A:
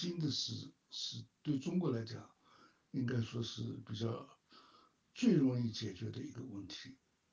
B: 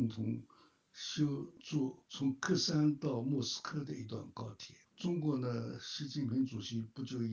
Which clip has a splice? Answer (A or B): B